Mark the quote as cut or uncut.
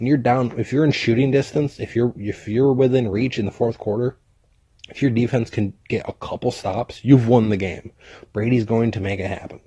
uncut